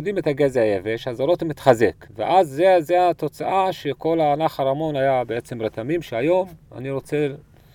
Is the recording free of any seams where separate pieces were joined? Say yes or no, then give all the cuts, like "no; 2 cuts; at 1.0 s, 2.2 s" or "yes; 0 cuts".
no; 2 cuts; at 2.1 s, 6.6 s